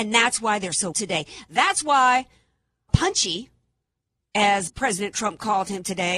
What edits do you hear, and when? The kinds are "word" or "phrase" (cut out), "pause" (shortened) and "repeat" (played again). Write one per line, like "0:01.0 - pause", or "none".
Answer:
0:00.9 - word
0:02.9 - word
0:04.7 - word